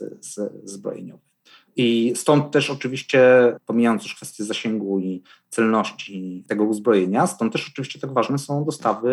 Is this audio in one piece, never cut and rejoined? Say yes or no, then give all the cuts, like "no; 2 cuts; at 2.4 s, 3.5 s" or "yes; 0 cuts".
yes; 0 cuts